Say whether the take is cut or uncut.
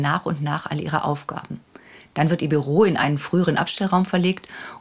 uncut